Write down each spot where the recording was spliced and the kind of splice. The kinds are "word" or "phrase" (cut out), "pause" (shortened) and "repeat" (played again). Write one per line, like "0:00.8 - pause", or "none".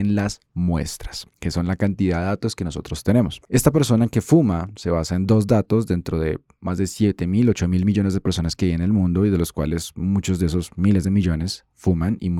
0:01.3 - pause